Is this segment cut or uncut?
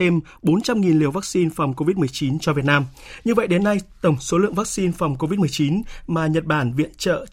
uncut